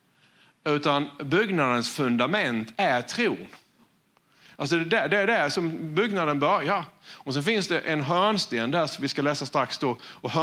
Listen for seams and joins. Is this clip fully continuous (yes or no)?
yes